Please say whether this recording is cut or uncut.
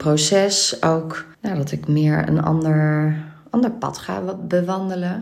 cut